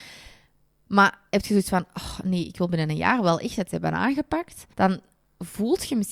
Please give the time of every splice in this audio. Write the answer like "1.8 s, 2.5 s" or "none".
4.7 s